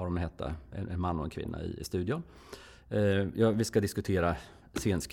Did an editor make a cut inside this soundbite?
no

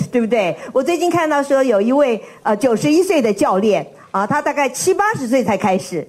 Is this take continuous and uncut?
yes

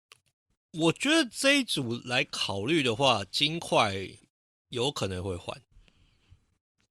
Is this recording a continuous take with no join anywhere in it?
yes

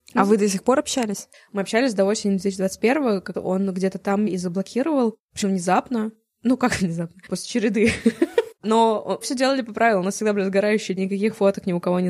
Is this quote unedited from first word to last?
no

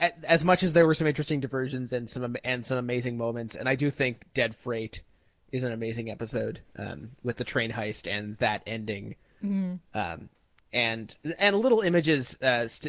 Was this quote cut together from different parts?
no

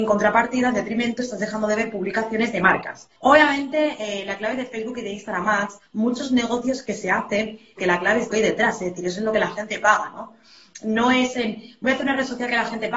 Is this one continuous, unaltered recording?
no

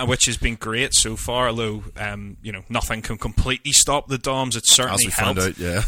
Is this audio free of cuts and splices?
yes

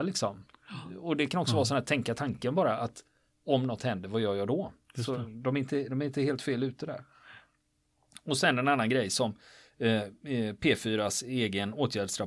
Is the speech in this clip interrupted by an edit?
no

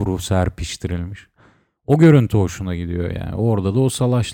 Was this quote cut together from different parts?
no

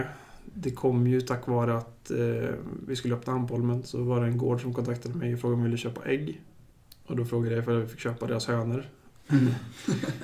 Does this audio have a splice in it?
no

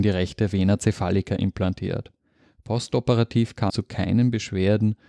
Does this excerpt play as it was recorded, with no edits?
no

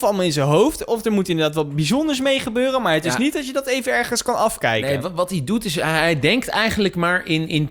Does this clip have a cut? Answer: no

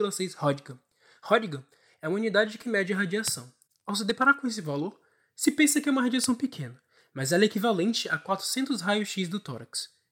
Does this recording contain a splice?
no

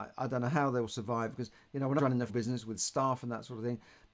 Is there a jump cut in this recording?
yes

